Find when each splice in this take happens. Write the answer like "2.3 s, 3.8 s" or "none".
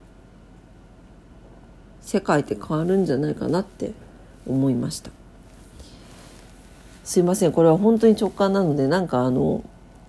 none